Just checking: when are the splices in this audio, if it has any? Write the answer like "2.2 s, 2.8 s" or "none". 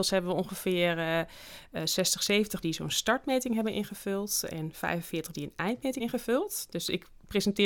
2.6 s, 5.3 s, 6.0 s